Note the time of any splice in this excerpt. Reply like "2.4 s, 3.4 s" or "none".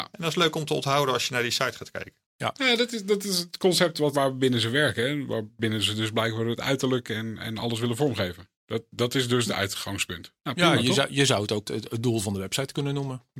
4.1 s, 8.5 s, 11.6 s